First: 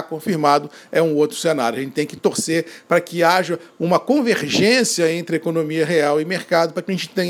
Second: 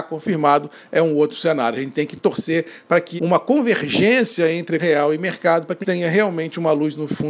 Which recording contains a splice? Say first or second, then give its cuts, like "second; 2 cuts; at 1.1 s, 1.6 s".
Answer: second; 3 cuts; at 3.2 s, 4.8 s, 5.8 s